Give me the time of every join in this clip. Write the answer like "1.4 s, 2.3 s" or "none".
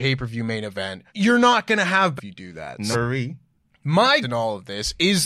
1.1 s, 2.2 s, 2.9 s, 4.2 s